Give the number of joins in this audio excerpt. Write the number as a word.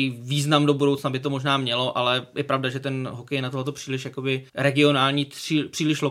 one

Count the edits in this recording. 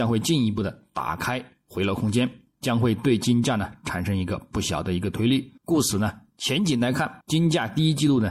two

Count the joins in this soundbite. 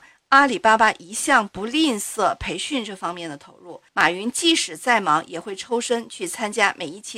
one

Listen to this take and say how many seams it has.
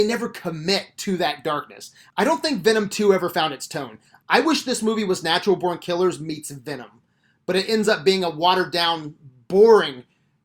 zero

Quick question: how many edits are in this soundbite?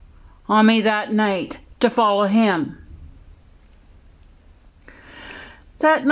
one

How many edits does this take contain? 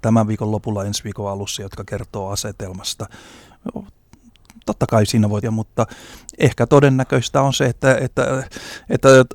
one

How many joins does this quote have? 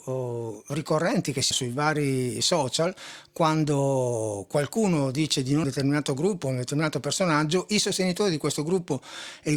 two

